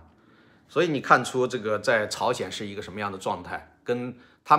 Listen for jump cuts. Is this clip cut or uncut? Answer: uncut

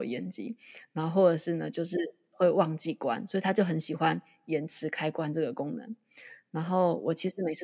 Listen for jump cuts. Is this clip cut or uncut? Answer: uncut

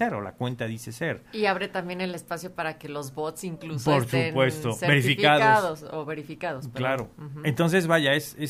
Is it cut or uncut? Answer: uncut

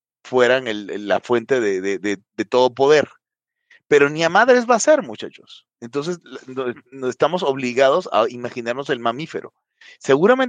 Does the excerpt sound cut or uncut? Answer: uncut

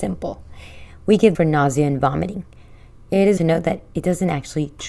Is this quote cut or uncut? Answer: cut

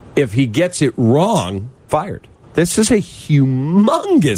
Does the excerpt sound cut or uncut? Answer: cut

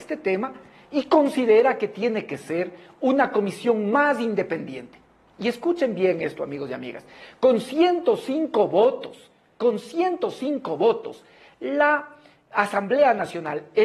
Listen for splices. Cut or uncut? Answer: uncut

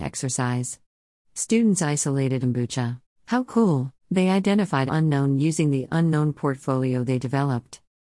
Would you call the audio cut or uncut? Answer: cut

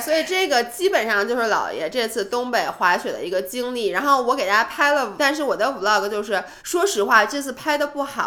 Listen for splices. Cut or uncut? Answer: cut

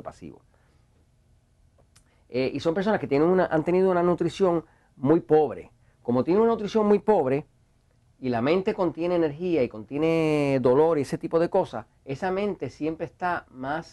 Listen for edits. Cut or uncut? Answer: cut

